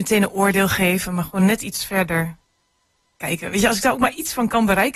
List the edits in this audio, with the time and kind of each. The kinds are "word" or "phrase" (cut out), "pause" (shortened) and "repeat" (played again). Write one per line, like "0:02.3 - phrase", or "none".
none